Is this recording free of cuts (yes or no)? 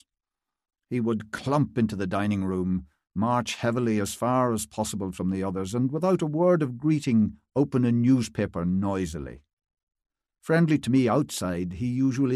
yes